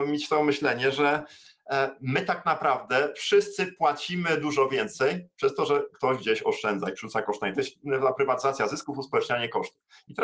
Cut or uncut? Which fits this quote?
uncut